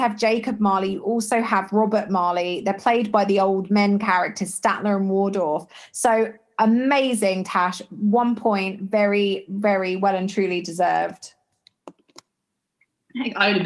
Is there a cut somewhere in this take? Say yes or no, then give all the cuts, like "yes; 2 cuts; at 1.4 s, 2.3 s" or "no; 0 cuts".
no; 0 cuts